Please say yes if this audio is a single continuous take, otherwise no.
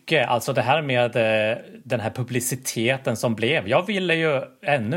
yes